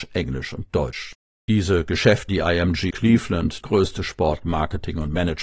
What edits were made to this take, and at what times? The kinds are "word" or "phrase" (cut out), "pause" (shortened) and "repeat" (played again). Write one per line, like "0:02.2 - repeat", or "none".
0:01.2 - pause
0:02.3 - word
0:02.9 - word
0:03.6 - word